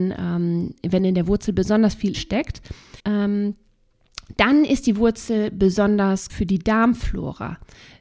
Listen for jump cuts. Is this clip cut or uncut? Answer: cut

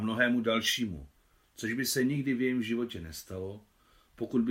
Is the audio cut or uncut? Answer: uncut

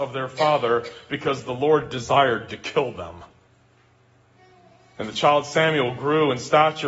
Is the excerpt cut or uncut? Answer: uncut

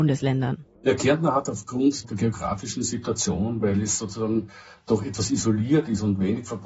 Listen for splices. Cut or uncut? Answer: uncut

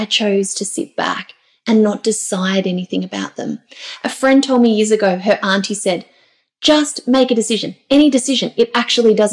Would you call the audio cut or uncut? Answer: uncut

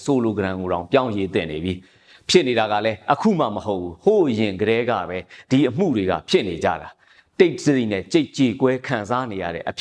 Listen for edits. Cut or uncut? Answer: uncut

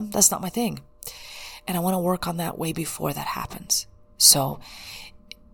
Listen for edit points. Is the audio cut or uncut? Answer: uncut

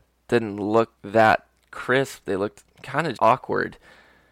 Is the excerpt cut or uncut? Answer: cut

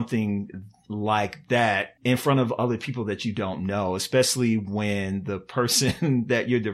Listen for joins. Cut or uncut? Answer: cut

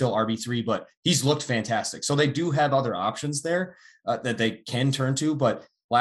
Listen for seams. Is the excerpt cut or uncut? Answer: uncut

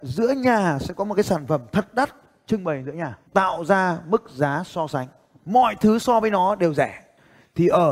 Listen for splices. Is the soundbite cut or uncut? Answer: cut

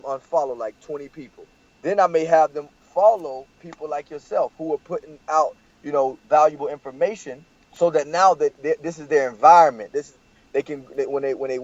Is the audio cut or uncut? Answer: cut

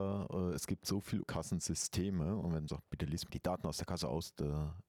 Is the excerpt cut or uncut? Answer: cut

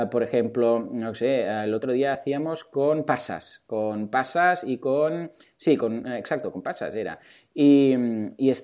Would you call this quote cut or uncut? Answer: uncut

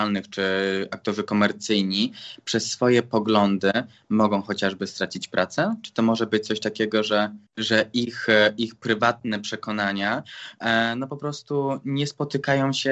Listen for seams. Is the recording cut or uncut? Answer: cut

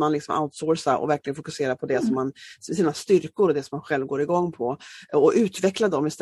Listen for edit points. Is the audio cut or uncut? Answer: uncut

